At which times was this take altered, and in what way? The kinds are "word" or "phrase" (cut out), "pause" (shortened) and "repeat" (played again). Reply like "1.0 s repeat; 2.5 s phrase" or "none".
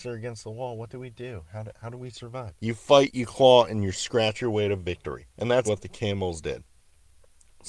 2.6 s pause; 5.3 s pause; 5.7 s word